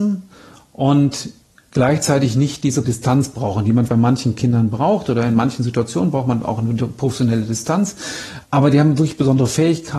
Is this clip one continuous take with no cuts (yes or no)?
no